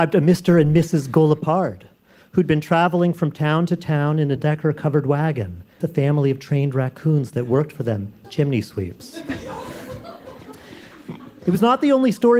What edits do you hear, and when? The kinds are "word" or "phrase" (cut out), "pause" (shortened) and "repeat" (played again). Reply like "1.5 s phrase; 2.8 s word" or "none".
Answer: 4.4 s word; 5.8 s word; 8.2 s word